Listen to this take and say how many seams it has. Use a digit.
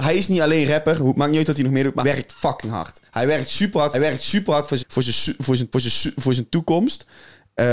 5